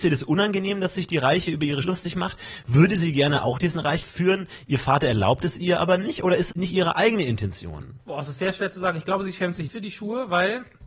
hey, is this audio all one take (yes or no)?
no